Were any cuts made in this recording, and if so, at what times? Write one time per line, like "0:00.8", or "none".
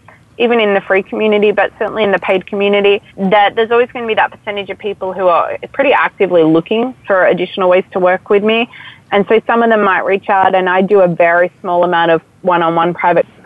0:03.1